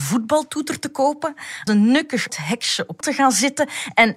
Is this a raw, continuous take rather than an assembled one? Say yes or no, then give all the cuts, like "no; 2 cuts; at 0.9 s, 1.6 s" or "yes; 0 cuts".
no; 3 cuts; at 1.7 s, 2.3 s, 3.0 s